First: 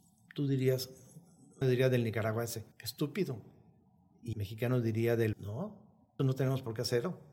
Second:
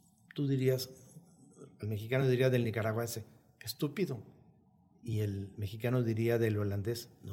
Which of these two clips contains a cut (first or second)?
first